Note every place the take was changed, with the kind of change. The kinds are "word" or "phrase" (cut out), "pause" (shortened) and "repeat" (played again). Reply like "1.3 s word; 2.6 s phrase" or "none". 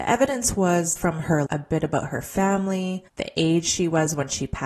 1.0 s word; 1.5 s word; 3.1 s pause